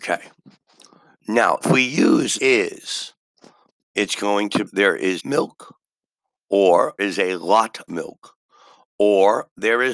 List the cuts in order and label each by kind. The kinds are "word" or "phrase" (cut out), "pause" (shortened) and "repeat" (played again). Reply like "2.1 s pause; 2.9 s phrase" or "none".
1.6 s word; 2.4 s word; 4.6 s word; 5.2 s word; 7.0 s word; 7.9 s word

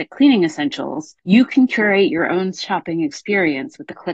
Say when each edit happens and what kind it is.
1.2 s pause

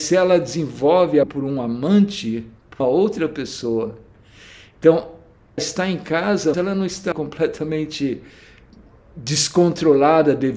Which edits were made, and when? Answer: 1.2 s word; 2.8 s word; 5.6 s word; 6.5 s word; 7.1 s word

